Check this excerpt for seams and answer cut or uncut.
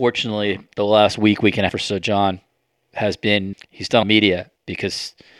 cut